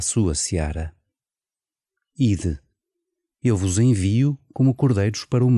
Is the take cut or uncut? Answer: uncut